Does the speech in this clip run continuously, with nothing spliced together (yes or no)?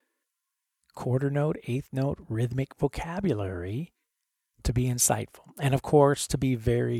yes